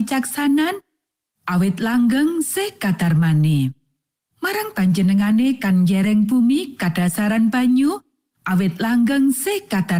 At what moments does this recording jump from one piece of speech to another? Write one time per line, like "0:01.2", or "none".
none